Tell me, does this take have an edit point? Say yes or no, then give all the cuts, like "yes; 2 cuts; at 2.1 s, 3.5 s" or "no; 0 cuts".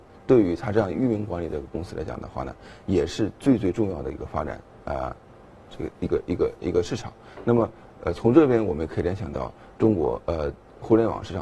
no; 0 cuts